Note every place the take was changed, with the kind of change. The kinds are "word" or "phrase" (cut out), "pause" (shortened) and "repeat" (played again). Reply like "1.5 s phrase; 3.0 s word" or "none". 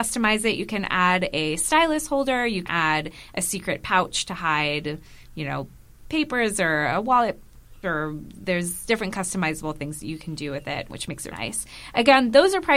2.7 s word; 7.8 s word; 10.9 s word; 11.3 s word